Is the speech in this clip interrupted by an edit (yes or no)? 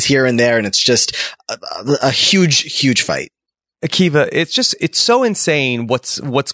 no